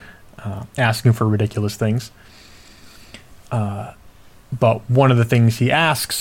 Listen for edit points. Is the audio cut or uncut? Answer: uncut